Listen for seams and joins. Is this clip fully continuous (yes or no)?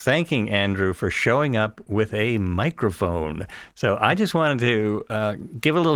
yes